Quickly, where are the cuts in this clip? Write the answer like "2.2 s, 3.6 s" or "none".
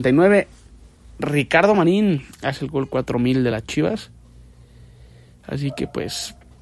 none